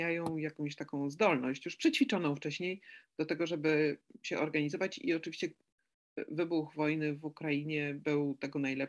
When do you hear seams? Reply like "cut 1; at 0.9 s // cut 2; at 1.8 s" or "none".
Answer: none